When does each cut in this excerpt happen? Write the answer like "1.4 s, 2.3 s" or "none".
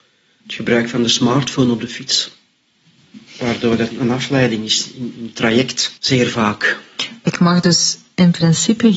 3.3 s, 3.9 s, 6.0 s